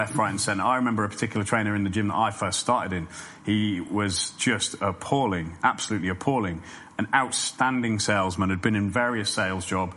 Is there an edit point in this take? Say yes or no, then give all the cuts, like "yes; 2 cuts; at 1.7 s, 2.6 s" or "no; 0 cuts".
no; 0 cuts